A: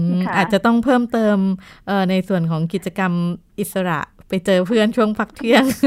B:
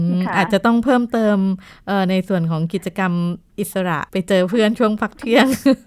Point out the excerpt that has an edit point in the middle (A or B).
B